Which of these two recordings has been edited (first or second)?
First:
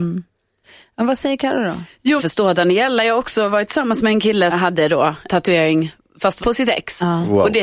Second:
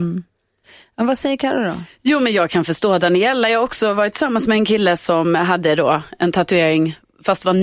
first